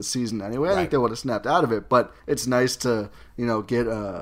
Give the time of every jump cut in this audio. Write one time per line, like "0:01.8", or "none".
0:02.2